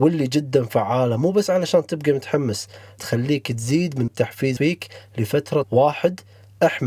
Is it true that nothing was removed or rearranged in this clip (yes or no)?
no